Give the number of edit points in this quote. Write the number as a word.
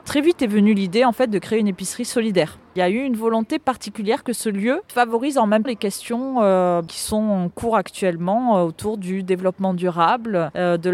one